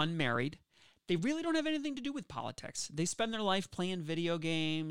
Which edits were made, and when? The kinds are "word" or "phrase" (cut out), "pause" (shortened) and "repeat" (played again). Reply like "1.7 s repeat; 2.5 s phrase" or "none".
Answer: none